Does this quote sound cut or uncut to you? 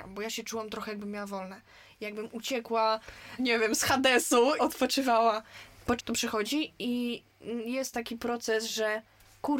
cut